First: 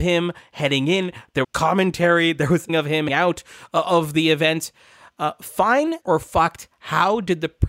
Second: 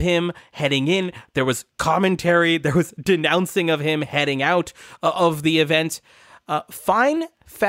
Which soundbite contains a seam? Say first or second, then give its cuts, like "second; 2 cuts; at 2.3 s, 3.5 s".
first; 4 cuts; at 1.4 s, 2.7 s, 3.1 s, 6.0 s